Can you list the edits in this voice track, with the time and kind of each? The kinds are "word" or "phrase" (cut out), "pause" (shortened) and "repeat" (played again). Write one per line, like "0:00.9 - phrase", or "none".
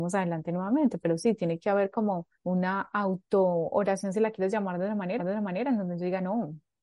0:02.3 - pause
0:05.2 - repeat